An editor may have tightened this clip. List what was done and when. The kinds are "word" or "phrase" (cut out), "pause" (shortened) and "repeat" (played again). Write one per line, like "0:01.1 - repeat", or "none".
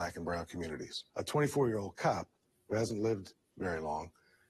none